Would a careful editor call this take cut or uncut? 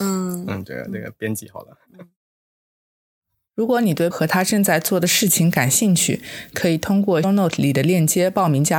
cut